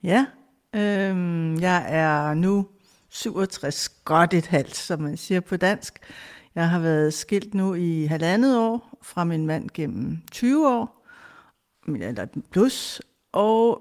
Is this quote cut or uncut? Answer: uncut